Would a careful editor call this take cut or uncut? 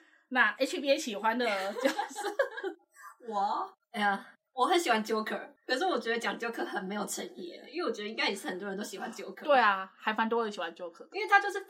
uncut